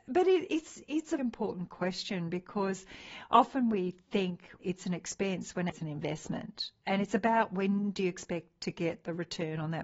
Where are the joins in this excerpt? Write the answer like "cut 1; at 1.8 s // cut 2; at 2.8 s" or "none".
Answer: cut 1; at 1.2 s // cut 2; at 4.6 s // cut 3; at 5.7 s